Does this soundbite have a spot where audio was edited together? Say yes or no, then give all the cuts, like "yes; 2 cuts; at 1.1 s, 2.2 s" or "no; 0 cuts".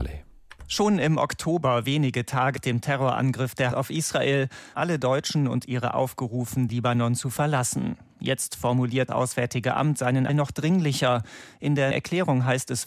yes; 8 cuts; at 2.6 s, 3.7 s, 4.7 s, 5.9 s, 6.7 s, 9.1 s, 10.3 s, 11.9 s